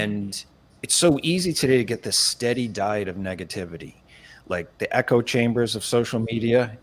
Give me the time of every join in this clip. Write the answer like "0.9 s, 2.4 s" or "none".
none